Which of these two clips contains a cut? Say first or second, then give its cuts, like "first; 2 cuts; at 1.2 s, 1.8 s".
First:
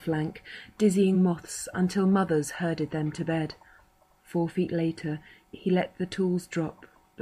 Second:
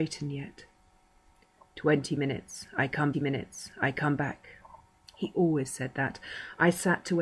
second; 1 cut; at 3.1 s